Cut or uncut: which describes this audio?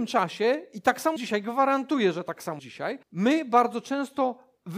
cut